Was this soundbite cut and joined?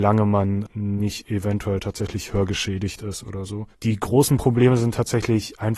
yes; 1 cut; at 3.7 s

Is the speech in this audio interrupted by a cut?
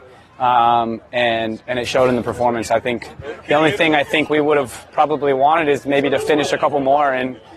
no; 0 cuts

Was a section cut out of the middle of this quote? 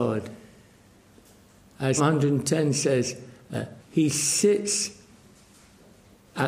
yes; 2 cuts; at 2.0 s, 3.8 s

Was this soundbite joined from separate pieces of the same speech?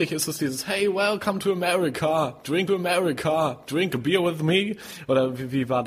yes; 1 cut; at 2.7 s

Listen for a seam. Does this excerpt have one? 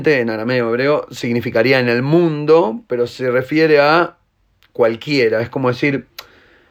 no; 0 cuts

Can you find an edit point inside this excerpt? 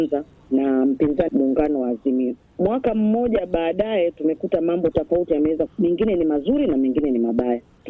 yes; 3 cuts; at 1.3 s, 4.9 s, 5.7 s

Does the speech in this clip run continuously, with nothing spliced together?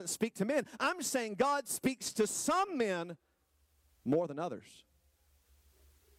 yes; 0 cuts

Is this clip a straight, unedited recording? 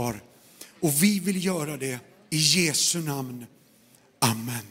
yes; 0 cuts

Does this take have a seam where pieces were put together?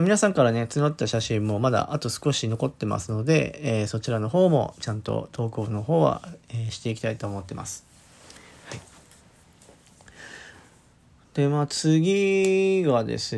no; 0 cuts

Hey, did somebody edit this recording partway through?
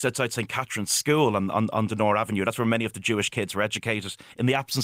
no; 0 cuts

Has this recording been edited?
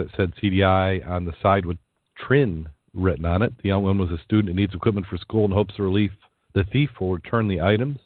no; 0 cuts

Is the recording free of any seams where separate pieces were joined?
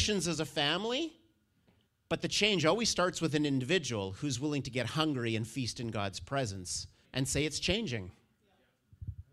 no; 2 cuts; at 1.9 s, 7.0 s

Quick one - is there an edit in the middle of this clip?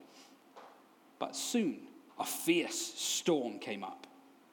yes; 1 cut; at 2.1 s

